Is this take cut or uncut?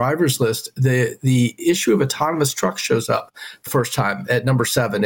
cut